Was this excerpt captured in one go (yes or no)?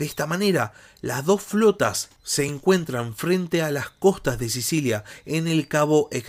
yes